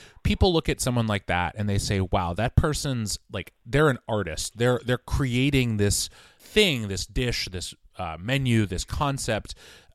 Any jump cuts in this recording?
no; 0 cuts

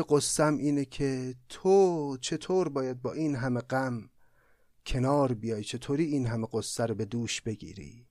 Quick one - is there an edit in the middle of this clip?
no; 0 cuts

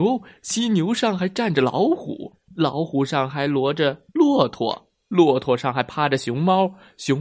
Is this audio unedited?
no; 1 cut; at 4.1 s

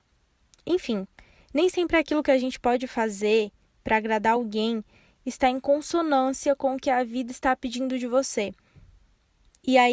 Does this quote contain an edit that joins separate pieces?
no; 0 cuts

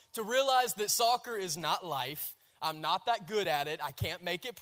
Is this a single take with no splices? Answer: yes; 0 cuts

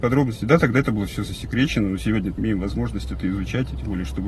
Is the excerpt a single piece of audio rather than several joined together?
no; 1 cut; at 2.4 s

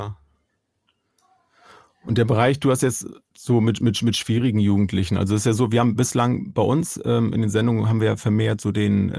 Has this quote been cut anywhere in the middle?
no; 0 cuts

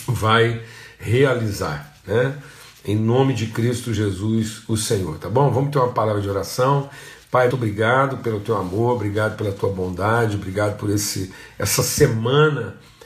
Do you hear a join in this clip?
yes; 1 cut; at 7.5 s

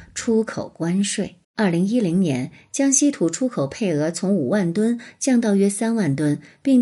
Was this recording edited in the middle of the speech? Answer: yes; 1 cut; at 1.4 s

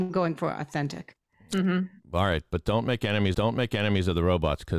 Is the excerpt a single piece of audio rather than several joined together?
no; 1 cut; at 3.3 s

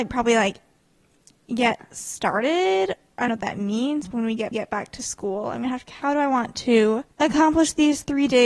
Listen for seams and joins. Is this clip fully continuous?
no; 5 cuts; at 3.3 s, 4.1 s, 4.5 s, 5.9 s, 7.1 s

